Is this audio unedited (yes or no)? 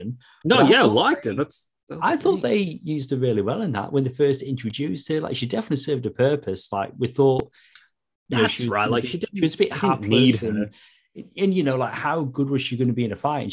yes